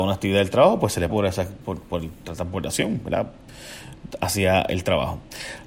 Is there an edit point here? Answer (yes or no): yes